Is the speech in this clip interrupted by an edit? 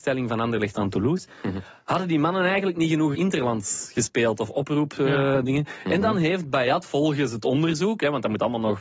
yes; 1 cut; at 3.1 s

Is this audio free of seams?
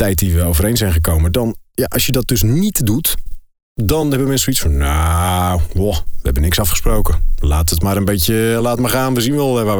yes; 0 cuts

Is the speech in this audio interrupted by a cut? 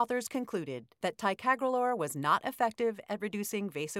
no; 0 cuts

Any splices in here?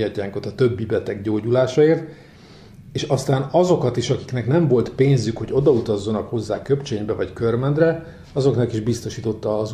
no; 0 cuts

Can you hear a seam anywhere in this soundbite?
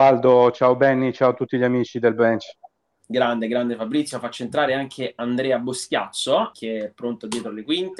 yes; 1 cut; at 6.5 s

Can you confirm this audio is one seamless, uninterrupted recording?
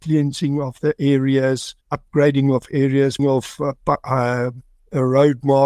no; 2 cuts; at 1.8 s, 3.2 s

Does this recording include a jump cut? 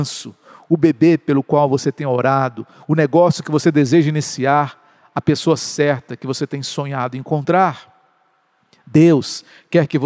no; 0 cuts

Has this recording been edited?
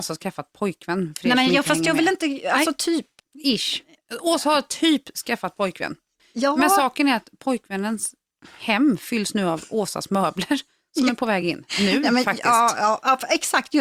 no; 0 cuts

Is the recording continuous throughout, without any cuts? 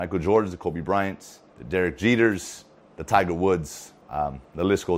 no; 3 cuts; at 1.5 s, 2.8 s, 4.0 s

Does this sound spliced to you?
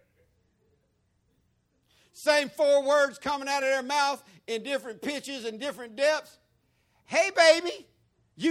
no; 0 cuts

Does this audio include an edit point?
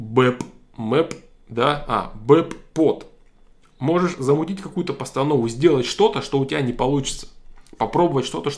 no; 0 cuts

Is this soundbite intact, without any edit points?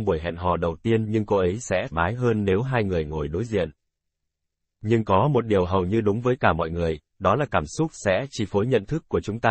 no; 2 cuts; at 1.9 s, 6.4 s

